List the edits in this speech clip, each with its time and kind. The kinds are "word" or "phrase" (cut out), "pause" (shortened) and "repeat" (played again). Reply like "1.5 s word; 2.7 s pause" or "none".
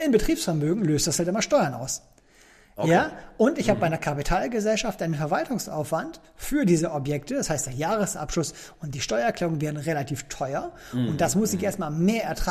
none